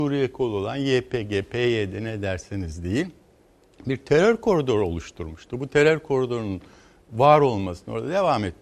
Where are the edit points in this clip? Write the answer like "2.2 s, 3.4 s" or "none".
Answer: none